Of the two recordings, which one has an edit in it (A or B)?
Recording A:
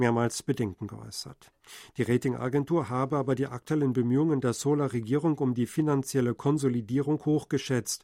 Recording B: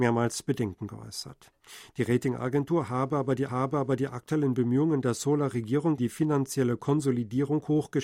B